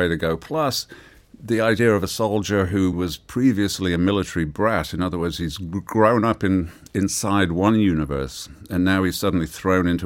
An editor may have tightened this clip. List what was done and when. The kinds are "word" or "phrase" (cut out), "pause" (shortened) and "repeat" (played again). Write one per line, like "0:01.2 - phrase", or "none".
0:02.9 - word

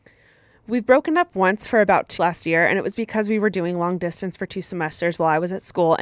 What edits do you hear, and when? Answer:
0:02.2 - word

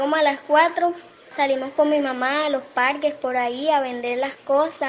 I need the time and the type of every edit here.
none

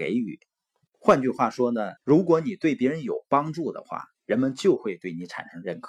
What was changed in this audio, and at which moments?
0:02.0 - pause
0:04.1 - pause

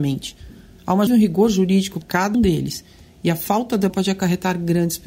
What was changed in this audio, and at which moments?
0:01.1 - word
0:02.0 - word
0:02.3 - word
0:03.9 - word

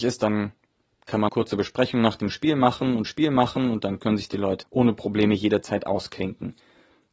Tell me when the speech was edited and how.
0:01.3 - phrase
0:03.1 - repeat
0:04.6 - word

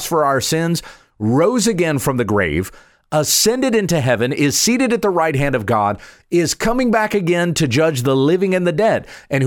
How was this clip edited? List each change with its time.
none

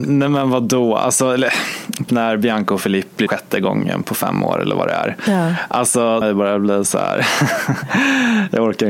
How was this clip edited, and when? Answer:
0:02.1 - word
0:03.3 - phrase
0:04.0 - word
0:06.2 - phrase

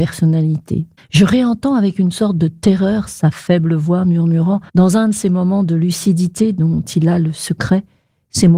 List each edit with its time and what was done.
0:01.0 - pause
0:04.7 - pause

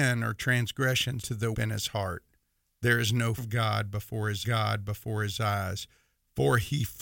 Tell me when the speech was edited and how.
0:01.2 - word
0:01.5 - phrase
0:03.4 - word
0:04.4 - repeat

